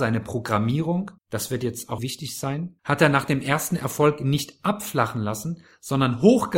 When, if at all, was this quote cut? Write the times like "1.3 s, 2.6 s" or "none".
1.2 s, 2.0 s, 2.8 s